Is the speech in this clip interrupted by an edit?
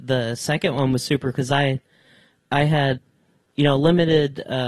yes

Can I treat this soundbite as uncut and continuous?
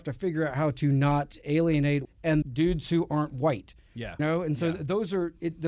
no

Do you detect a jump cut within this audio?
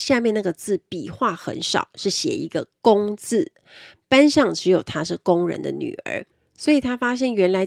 yes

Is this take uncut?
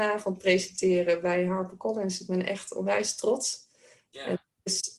yes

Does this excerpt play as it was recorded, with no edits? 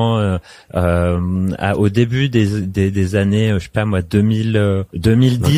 yes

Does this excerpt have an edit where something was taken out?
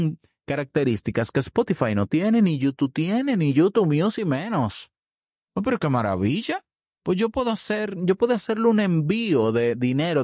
no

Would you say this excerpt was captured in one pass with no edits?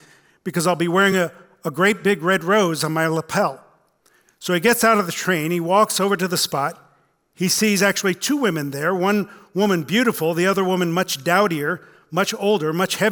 yes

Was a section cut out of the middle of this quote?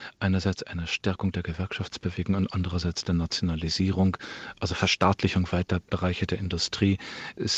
no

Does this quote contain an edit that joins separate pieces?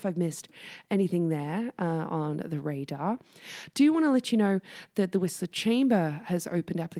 no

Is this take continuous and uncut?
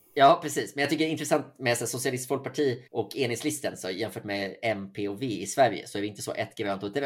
no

